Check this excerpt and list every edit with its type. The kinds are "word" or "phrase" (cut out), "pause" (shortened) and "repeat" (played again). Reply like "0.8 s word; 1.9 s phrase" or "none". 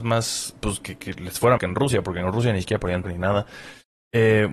1.0 s word; 1.6 s word; 3.0 s word